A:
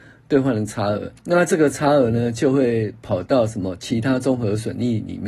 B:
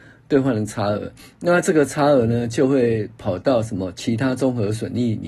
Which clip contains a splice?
A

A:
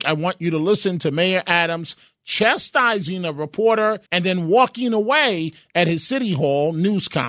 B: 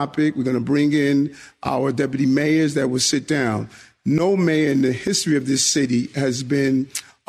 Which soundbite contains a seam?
A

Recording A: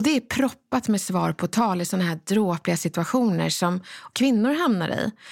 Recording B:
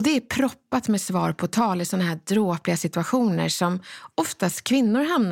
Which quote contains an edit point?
A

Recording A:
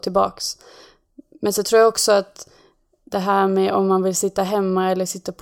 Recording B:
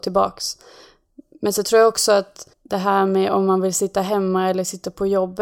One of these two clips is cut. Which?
B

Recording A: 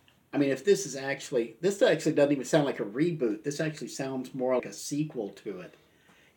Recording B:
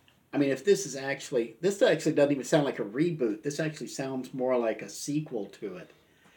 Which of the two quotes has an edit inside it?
A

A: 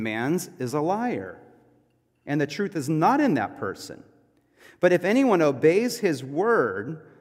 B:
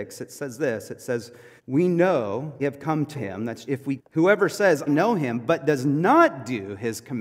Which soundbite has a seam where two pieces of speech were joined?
B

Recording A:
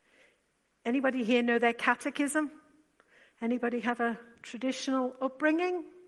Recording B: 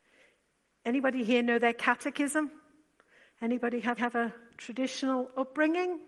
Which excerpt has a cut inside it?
B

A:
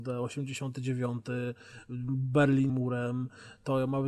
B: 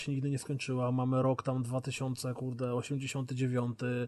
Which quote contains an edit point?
A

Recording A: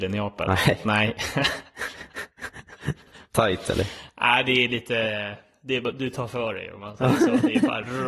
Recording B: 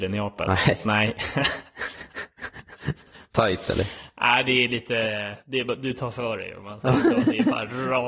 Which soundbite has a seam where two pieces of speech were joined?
B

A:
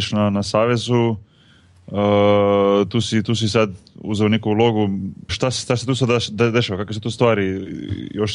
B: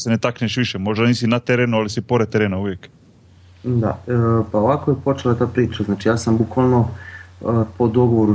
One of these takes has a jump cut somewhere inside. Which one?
A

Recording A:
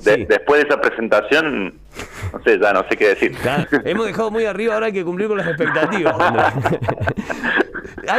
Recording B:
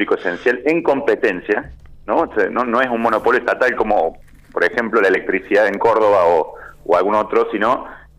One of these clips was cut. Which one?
A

